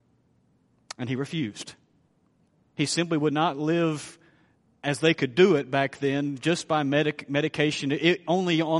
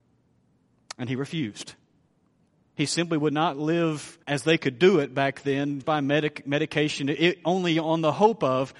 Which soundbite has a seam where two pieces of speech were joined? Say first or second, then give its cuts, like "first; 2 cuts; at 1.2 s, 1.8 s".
second; 2 cuts; at 4.2 s, 5.8 s